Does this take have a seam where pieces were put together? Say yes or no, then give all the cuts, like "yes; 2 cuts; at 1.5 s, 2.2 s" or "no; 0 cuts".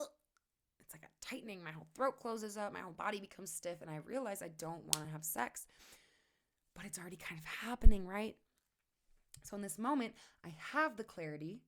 no; 0 cuts